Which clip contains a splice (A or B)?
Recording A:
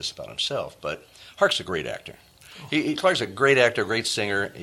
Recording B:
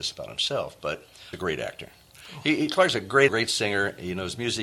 B